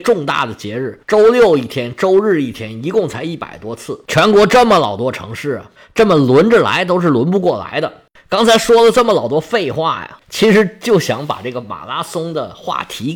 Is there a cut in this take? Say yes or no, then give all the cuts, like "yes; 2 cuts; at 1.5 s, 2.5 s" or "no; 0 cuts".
yes; 2 cuts; at 1.0 s, 10.2 s